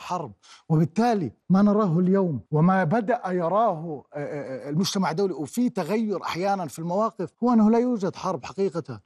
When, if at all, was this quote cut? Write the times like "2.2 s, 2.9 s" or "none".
1.4 s, 2.5 s, 7.3 s